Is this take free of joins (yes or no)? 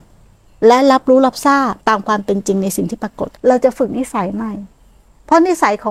no